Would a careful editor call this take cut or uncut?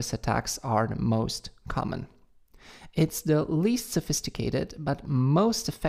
uncut